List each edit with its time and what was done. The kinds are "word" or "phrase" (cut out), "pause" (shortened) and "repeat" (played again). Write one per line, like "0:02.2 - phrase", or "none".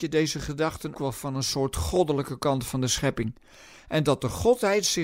0:00.9 - word